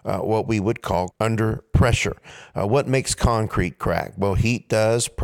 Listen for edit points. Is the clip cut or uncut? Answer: cut